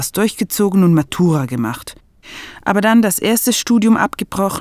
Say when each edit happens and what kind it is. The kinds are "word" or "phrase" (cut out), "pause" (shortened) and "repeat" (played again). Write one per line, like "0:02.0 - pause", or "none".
none